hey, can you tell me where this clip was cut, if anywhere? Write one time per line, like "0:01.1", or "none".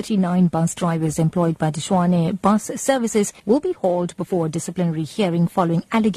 0:03.4